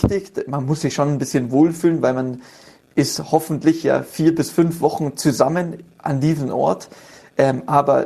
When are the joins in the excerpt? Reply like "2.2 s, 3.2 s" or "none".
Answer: none